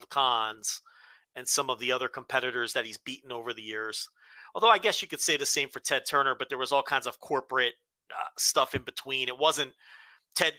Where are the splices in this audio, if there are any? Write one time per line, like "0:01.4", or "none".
none